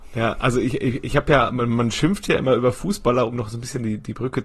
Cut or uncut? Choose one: uncut